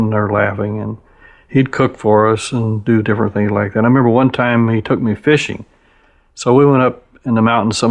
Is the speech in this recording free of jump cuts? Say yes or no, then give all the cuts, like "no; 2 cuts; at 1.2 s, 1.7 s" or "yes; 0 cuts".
yes; 0 cuts